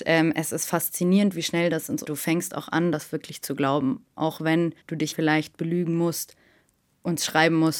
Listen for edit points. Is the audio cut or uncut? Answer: cut